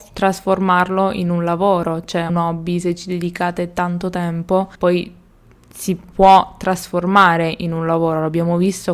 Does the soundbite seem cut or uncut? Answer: cut